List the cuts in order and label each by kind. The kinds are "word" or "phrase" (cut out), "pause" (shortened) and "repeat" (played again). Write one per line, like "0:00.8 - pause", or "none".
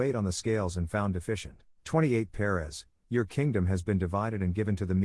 0:01.7 - pause

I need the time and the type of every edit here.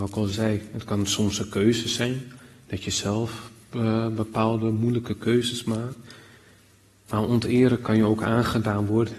none

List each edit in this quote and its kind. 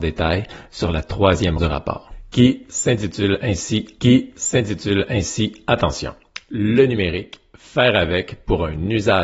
0:01.6 - word
0:04.0 - repeat

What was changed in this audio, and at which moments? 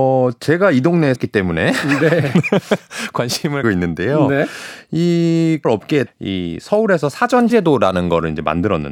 0:01.2 - word
0:03.6 - word
0:05.6 - word
0:06.1 - word
0:07.5 - word

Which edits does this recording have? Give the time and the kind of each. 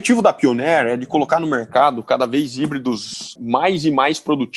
0:03.4 - word

